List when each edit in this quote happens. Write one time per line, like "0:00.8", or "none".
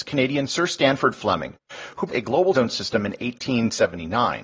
0:02.1
0:02.5